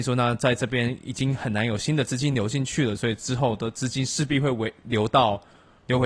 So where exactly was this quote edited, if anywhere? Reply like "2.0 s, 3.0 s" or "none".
none